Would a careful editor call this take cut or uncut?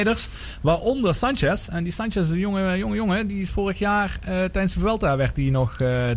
uncut